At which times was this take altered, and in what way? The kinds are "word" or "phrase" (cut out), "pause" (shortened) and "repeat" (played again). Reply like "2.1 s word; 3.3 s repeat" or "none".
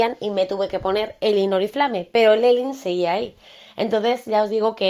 none